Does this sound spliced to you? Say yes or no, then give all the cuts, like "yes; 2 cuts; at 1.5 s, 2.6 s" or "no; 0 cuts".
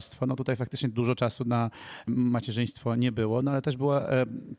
no; 0 cuts